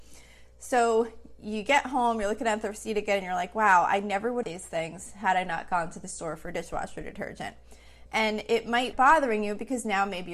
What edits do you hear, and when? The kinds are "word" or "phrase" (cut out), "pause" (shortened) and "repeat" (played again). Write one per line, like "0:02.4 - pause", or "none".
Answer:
0:04.4 - phrase
0:08.9 - phrase